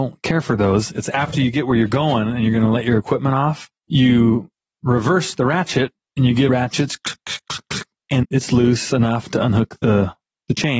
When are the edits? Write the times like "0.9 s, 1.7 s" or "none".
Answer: 3.8 s, 6.5 s, 8.2 s